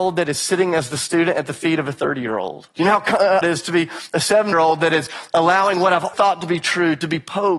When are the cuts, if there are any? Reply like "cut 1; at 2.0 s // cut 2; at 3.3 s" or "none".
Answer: cut 1; at 2.7 s // cut 2; at 3.4 s // cut 3; at 4.5 s // cut 4; at 6.1 s